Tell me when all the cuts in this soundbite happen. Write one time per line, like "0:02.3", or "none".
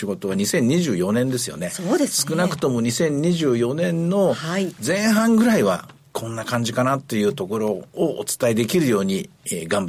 none